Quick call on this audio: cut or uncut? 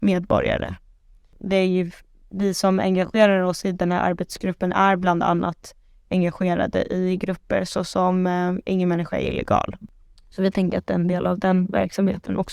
uncut